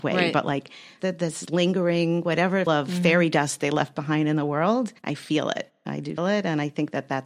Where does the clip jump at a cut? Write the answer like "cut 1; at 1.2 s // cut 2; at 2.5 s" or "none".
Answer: cut 1; at 1.0 s // cut 2; at 2.7 s // cut 3; at 5.0 s // cut 4; at 6.2 s

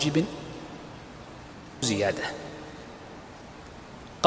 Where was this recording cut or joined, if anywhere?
cut 1; at 1.8 s

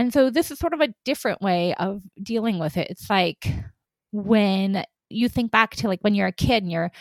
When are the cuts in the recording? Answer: cut 1; at 5.1 s

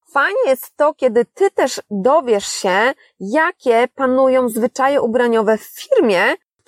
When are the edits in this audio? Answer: none

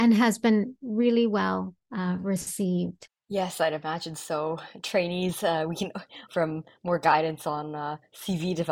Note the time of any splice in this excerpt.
cut 1; at 3.2 s // cut 2; at 6.3 s

